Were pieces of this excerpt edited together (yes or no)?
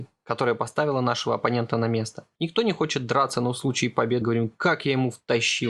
yes